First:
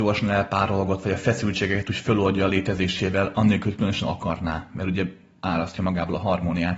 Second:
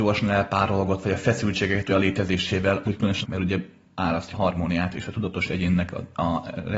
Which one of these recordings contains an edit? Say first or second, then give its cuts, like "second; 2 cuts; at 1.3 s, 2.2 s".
second; 4 cuts; at 1.9 s, 2.8 s, 3.2 s, 4.3 s